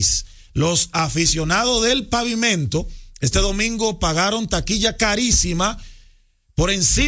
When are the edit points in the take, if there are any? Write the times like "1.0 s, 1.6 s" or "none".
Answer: none